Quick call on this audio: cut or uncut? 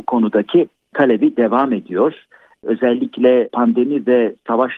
uncut